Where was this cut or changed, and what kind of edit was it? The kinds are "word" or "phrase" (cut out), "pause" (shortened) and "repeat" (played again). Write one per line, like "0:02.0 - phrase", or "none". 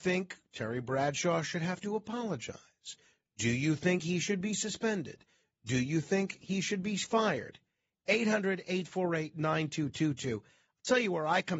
none